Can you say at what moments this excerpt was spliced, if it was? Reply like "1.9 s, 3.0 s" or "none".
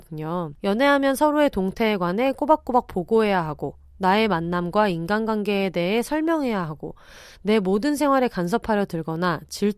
none